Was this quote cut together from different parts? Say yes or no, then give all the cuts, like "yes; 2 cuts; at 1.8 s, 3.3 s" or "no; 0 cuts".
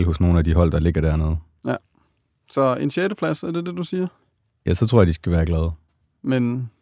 no; 0 cuts